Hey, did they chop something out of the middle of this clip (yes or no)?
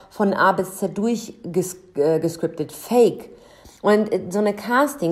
yes